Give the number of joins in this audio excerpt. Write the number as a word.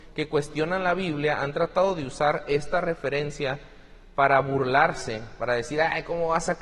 zero